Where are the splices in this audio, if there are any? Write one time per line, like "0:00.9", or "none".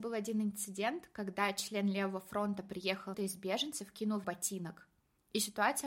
0:03.1
0:04.2